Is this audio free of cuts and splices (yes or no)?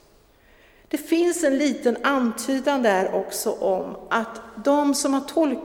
yes